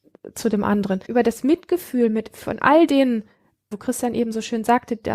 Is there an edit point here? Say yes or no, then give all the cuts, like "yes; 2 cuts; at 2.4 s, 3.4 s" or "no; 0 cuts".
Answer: yes; 2 cuts; at 1.0 s, 3.7 s